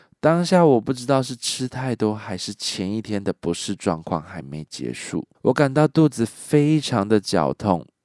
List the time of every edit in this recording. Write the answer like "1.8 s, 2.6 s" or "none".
5.3 s